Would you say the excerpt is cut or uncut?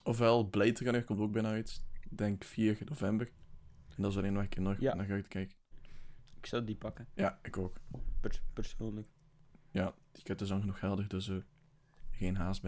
uncut